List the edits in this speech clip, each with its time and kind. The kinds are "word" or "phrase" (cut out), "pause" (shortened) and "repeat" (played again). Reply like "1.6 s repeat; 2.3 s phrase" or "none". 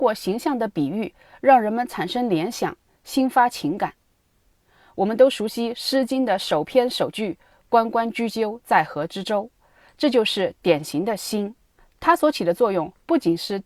11.8 s pause